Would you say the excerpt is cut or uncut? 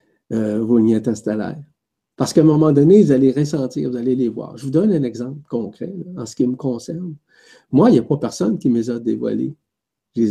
uncut